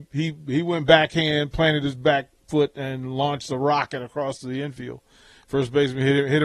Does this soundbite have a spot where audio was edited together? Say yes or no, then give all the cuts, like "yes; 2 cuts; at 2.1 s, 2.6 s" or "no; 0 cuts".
no; 0 cuts